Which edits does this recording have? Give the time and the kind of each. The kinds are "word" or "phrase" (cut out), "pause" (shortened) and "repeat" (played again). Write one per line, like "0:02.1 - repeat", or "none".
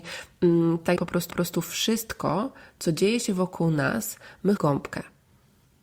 0:01.0 - word
0:01.3 - repeat
0:04.6 - phrase